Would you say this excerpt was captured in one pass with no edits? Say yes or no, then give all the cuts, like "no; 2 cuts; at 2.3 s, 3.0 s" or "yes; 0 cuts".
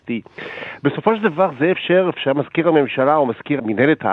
yes; 0 cuts